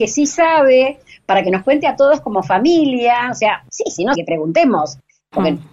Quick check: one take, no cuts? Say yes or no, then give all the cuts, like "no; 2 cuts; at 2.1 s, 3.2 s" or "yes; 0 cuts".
no; 1 cut; at 4.1 s